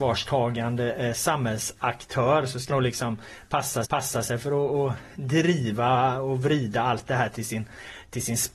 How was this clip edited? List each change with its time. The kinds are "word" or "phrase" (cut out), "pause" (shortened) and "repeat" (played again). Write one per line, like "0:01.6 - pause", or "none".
0:02.7 - word
0:03.8 - repeat